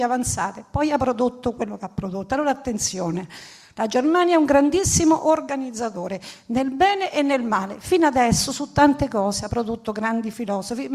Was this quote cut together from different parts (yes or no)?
no